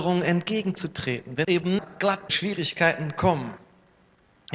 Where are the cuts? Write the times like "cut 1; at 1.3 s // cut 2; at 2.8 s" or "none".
cut 1; at 1.4 s // cut 2; at 1.8 s // cut 3; at 2.3 s